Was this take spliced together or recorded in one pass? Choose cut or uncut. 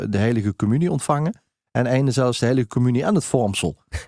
uncut